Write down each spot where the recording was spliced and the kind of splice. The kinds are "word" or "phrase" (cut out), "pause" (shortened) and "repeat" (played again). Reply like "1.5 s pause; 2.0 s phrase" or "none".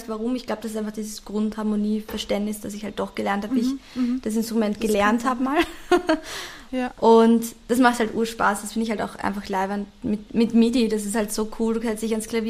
none